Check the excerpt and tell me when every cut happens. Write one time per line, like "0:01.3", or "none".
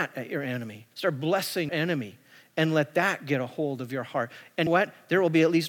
0:00.9
0:01.7
0:04.7